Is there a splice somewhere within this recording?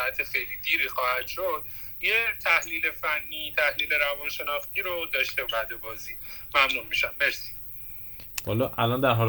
yes; 1 cut; at 5.5 s

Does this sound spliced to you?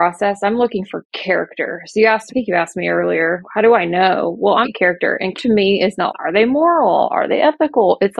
yes; 5 cuts; at 2.3 s, 3.4 s, 4.6 s, 5.3 s, 6.1 s

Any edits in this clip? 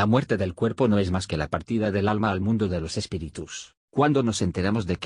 yes; 1 cut; at 3.8 s

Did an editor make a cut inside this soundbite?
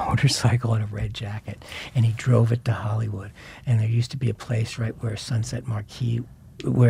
no; 0 cuts

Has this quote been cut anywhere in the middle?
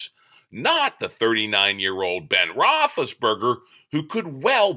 no; 0 cuts

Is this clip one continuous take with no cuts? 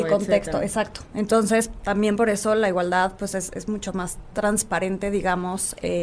yes; 0 cuts

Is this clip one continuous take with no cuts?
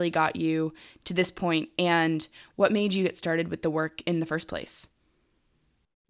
yes; 0 cuts

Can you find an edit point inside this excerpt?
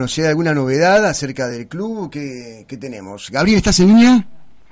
no; 0 cuts

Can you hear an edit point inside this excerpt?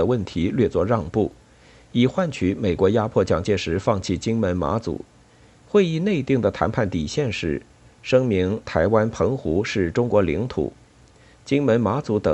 yes; 1 cut; at 5.3 s

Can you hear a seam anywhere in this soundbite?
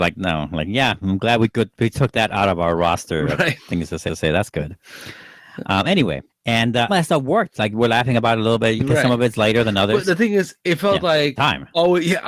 yes; 7 cuts; at 1.0 s, 4.1 s, 6.3 s, 6.9 s, 8.8 s, 10.6 s, 11.4 s

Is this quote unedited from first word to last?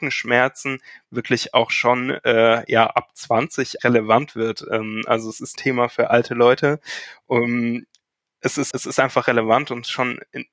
no; 3 cuts; at 3.8 s, 5.6 s, 8.7 s

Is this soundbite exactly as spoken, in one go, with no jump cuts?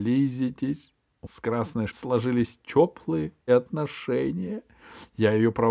no; 3 cuts; at 1.2 s, 1.9 s, 3.5 s

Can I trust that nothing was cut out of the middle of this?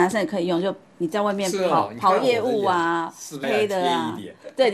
no; 1 cut; at 3.4 s

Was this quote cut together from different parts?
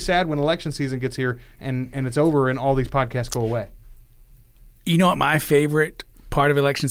no; 0 cuts

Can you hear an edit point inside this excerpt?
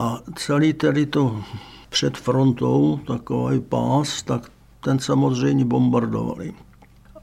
no; 0 cuts

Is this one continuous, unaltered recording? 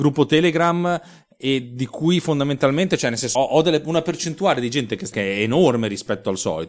no; 2 cuts; at 3.4 s, 5.1 s

